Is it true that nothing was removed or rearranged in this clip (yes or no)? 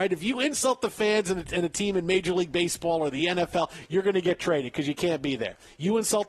yes